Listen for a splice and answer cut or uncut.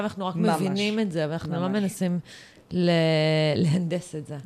uncut